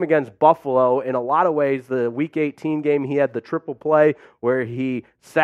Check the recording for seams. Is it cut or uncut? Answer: uncut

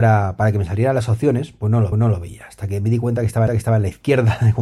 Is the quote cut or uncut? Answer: cut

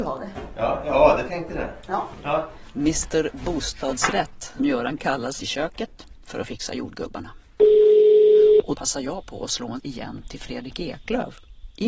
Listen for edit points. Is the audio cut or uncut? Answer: cut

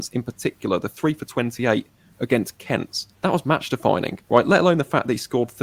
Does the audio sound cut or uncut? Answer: cut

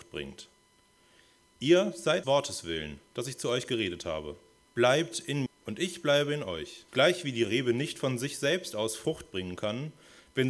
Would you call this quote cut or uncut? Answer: cut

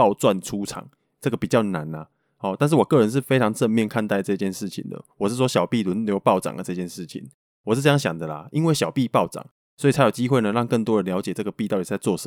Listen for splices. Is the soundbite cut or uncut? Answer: uncut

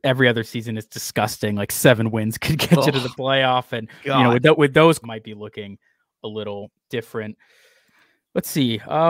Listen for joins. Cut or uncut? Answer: cut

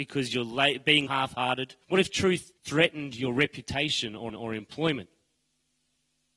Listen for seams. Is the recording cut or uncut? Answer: cut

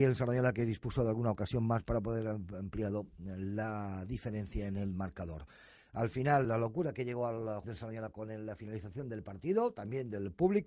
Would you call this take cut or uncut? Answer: cut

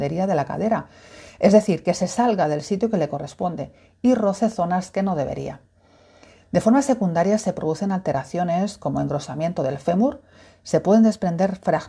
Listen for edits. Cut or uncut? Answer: uncut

